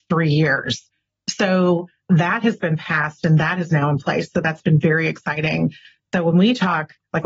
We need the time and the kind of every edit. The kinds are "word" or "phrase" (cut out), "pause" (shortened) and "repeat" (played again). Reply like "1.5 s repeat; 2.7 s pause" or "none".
none